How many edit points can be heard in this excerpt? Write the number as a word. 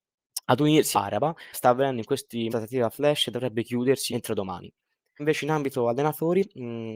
five